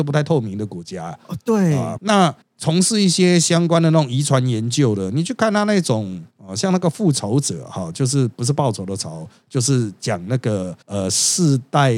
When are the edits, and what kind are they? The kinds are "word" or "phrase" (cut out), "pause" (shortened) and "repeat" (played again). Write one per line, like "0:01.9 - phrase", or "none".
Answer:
0:02.0 - word
0:06.3 - pause
0:10.8 - pause